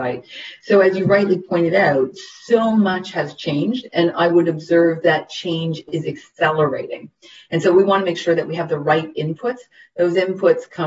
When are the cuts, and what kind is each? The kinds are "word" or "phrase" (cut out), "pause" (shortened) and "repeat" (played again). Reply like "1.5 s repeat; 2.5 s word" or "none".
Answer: none

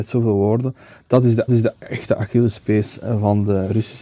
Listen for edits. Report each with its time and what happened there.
1.5 s repeat

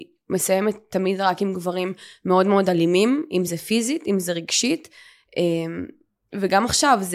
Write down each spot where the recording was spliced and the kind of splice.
none

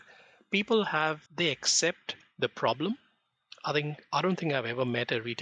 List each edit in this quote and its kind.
1.3 s pause

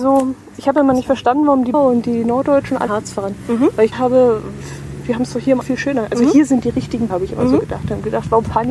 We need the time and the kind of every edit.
1.7 s word; 2.9 s word; 3.9 s word; 5.6 s word; 7.1 s word

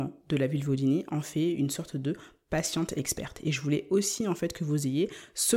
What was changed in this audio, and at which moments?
none

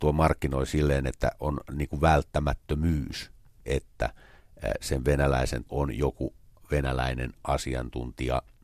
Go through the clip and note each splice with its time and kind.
5.7 s word

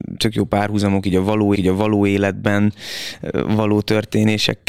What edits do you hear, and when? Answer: 1.6 s repeat

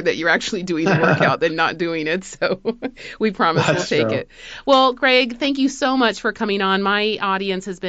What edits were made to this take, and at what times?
none

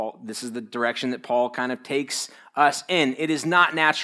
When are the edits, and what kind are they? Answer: none

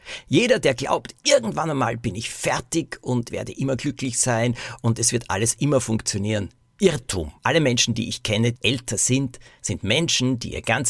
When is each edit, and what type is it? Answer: 3.3 s word; 7.4 s pause; 8.6 s word

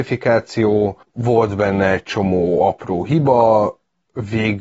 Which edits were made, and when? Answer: 1.0 s pause

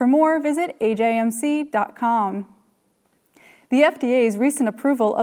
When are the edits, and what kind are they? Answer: none

